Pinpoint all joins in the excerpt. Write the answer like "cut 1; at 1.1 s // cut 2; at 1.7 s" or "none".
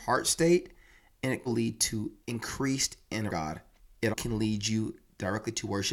cut 1; at 1.5 s // cut 2; at 2.2 s // cut 3; at 3.3 s // cut 4; at 4.1 s